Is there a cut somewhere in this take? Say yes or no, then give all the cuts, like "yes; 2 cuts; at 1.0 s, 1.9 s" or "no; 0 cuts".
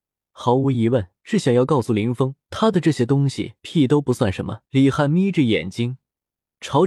yes; 4 cuts; at 1.2 s, 2.4 s, 3.6 s, 4.6 s